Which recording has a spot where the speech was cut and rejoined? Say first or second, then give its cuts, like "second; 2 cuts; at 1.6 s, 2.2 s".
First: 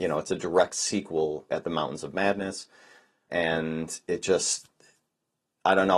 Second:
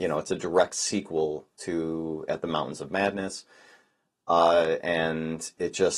first; 2 cuts; at 1.5 s, 3.3 s